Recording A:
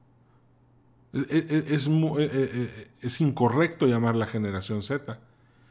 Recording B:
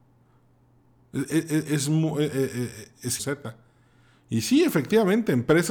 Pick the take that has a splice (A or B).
B